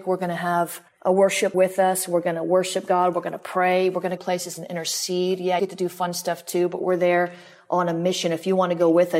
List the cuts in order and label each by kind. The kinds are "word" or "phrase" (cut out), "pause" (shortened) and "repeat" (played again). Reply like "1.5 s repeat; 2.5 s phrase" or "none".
1.5 s word; 4.2 s word; 5.6 s word